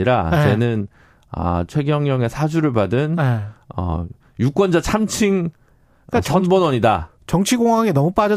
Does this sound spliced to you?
no; 0 cuts

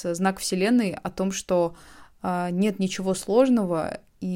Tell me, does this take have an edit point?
no; 0 cuts

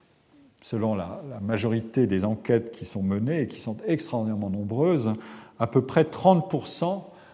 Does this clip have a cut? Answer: no; 0 cuts

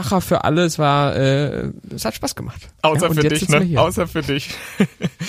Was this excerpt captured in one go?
yes; 0 cuts

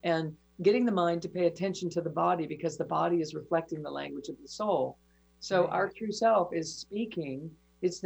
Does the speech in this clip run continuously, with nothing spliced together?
yes; 0 cuts

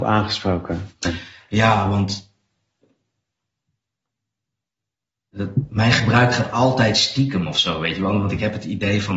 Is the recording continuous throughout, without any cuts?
yes; 0 cuts

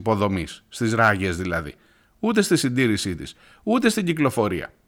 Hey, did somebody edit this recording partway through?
no; 0 cuts

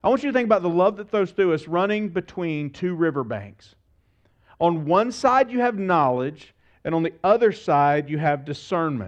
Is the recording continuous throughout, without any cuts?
yes; 0 cuts

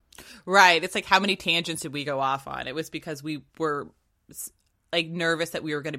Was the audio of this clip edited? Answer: yes; 1 cut; at 3.5 s

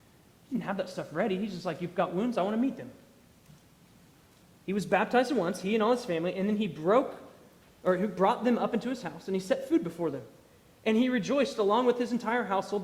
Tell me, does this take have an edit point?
no; 0 cuts

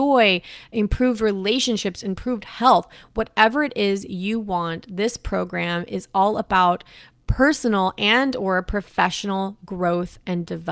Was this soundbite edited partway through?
no; 0 cuts

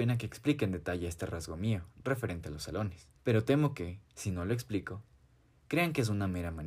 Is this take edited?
yes; 2 cuts; at 3.2 s, 4.1 s

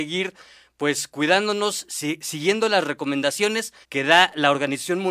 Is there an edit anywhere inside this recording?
yes; 1 cut; at 3.8 s

